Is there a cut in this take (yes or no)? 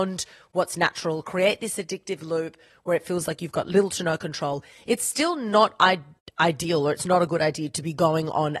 no